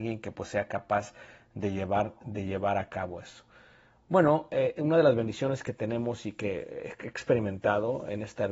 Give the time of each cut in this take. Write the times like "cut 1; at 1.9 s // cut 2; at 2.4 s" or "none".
none